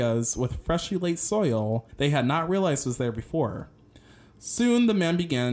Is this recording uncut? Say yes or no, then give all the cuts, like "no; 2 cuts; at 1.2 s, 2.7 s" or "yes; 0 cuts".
no; 1 cut; at 1.9 s